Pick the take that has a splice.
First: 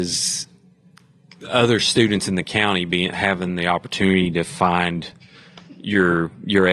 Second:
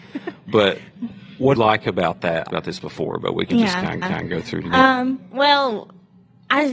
second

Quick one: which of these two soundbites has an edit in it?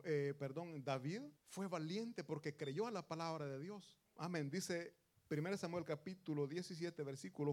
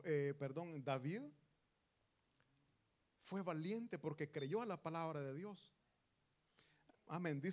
first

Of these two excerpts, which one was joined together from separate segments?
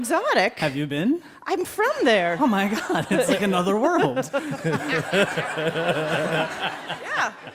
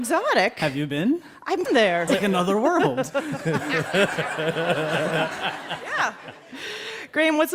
second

